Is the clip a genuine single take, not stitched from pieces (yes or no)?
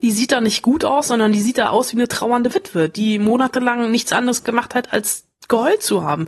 yes